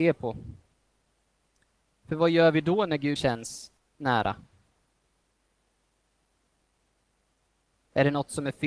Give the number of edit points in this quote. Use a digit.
2